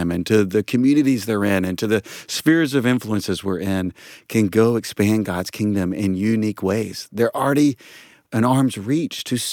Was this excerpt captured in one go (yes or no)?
yes